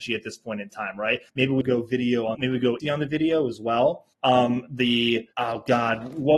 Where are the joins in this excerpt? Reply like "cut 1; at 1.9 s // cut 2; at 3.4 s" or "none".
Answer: cut 1; at 1.3 s // cut 2; at 1.6 s // cut 3; at 2.3 s // cut 4; at 2.8 s // cut 5; at 4.1 s // cut 6; at 5.3 s